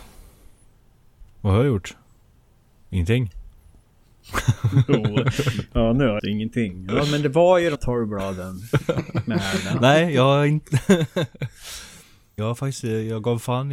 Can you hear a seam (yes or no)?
yes